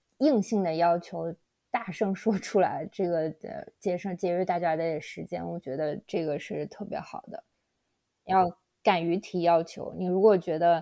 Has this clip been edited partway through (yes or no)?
no